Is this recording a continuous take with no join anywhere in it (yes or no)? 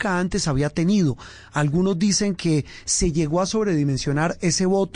yes